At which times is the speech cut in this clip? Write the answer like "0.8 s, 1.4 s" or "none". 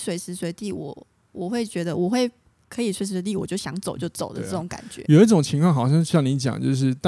none